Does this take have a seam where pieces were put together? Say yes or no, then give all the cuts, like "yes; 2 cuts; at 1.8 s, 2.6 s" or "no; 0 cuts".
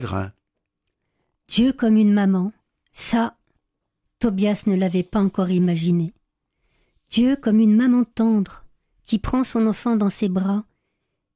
no; 0 cuts